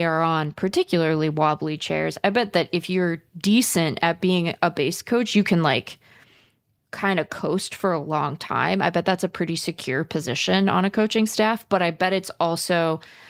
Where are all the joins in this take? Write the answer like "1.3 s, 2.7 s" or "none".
none

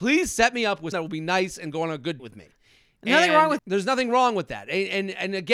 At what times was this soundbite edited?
0.9 s, 2.2 s, 3.6 s

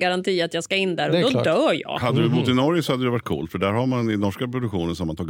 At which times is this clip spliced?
none

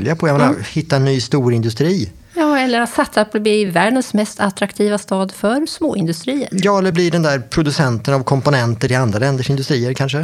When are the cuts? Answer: none

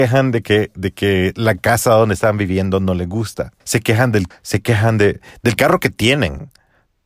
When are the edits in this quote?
3.6 s, 4.3 s

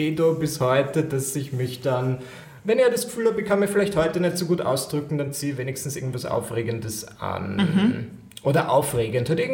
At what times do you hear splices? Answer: none

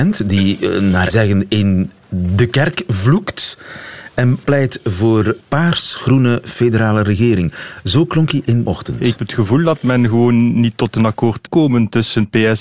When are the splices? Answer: 1.1 s, 4.4 s, 5.4 s, 8.6 s, 9.2 s, 11.5 s

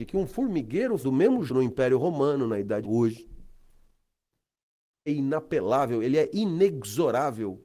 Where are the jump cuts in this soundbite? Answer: 1.0 s, 1.5 s, 2.8 s, 5.1 s

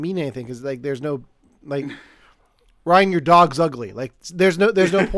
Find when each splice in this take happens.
none

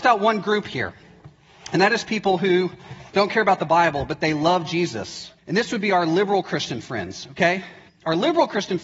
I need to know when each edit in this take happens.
3.1 s, 5.4 s, 7.9 s

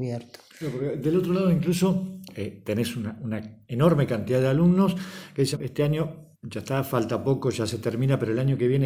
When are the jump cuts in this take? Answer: 5.5 s, 6.3 s

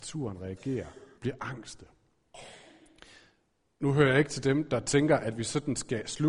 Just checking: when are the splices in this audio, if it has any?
1.1 s

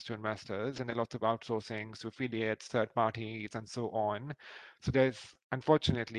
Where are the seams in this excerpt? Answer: none

